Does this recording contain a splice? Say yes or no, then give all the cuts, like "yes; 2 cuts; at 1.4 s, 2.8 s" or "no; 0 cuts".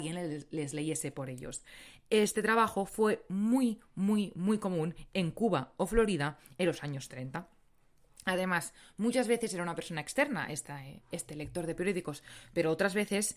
no; 0 cuts